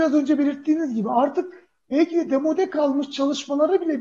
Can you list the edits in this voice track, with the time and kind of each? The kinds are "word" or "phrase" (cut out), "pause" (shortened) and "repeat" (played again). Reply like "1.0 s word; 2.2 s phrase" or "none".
none